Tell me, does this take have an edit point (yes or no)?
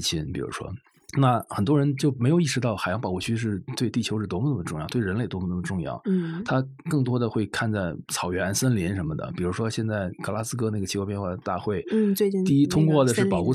no